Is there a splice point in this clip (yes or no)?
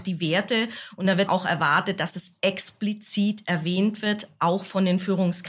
yes